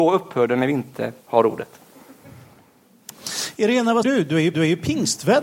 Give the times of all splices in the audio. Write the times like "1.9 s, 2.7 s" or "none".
1.2 s, 4.0 s, 4.5 s